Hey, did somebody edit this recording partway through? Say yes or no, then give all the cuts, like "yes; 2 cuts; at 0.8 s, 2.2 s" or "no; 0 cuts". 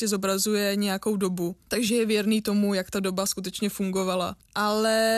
no; 0 cuts